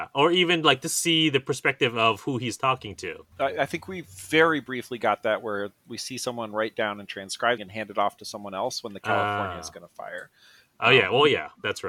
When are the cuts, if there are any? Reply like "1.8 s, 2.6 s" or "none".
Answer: 3.3 s, 7.6 s